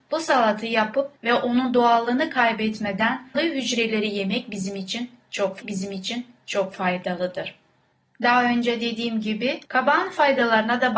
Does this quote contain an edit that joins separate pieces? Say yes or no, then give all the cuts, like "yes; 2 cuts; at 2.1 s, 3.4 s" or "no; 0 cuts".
yes; 4 cuts; at 1.2 s, 3.3 s, 5.6 s, 9.6 s